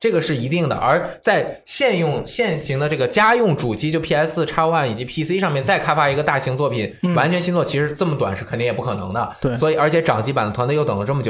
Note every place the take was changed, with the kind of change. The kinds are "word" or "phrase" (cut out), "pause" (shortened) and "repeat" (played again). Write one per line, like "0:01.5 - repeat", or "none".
none